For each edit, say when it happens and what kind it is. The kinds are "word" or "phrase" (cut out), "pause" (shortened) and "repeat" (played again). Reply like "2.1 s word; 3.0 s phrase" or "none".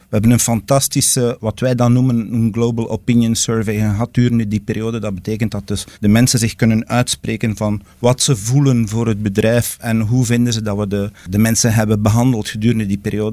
5.9 s pause; 7.9 s pause